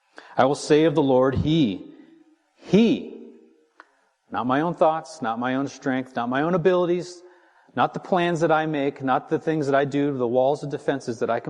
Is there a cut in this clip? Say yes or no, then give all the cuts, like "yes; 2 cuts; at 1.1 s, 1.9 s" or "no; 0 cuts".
no; 0 cuts